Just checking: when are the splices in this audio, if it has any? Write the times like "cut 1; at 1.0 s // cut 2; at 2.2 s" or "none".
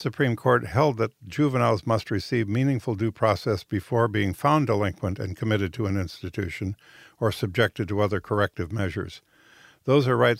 none